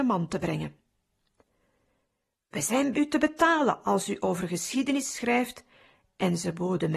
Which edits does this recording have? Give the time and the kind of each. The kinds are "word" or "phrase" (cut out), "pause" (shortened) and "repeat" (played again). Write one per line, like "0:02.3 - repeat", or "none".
0:02.9 - word